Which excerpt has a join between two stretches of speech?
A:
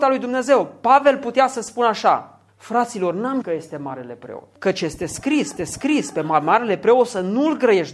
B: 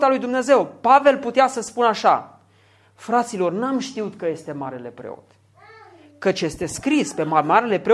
A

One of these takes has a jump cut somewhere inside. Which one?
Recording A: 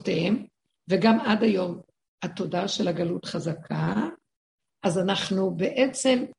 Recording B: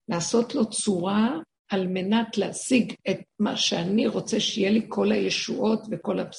B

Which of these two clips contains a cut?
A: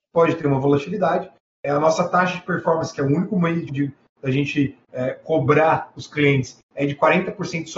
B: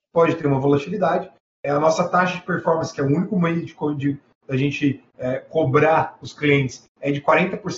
A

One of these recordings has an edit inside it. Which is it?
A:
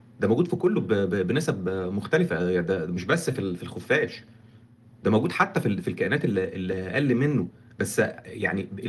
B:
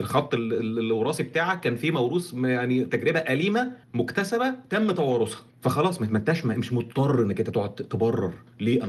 B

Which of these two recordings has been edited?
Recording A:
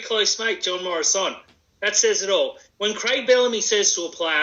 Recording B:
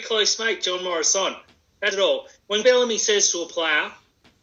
B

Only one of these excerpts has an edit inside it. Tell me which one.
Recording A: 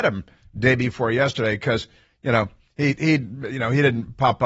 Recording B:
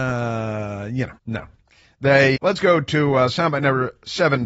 B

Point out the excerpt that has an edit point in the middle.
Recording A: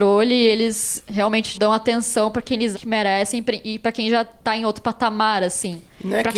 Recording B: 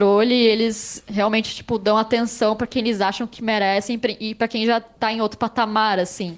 A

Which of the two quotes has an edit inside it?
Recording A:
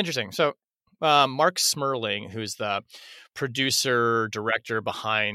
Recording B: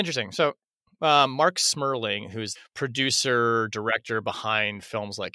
B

